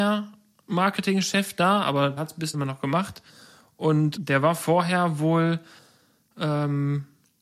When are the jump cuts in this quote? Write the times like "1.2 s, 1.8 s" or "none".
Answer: 2.2 s, 2.5 s, 4.2 s